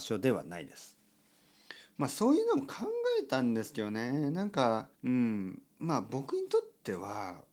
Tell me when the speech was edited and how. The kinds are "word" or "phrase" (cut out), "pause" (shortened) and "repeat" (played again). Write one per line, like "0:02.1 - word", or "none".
0:04.9 - pause